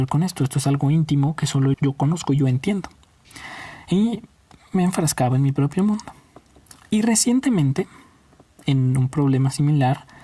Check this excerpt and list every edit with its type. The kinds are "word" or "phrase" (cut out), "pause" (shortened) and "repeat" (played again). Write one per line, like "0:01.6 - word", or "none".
0:01.7 - word